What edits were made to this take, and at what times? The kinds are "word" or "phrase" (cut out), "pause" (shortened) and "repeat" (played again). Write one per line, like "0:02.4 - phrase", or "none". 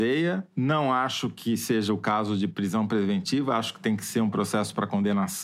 none